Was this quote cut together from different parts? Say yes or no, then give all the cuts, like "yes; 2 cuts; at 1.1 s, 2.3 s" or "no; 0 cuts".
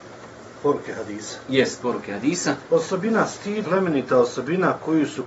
yes; 1 cut; at 3.6 s